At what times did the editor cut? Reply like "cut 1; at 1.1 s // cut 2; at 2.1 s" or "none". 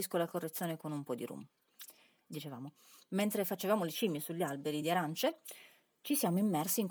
none